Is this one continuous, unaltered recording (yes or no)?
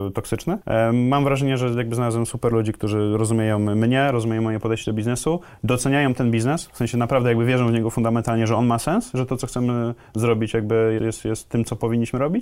no